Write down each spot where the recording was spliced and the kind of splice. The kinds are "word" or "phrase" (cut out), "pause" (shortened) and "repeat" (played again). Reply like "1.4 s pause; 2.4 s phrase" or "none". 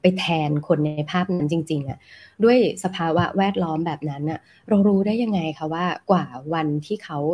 none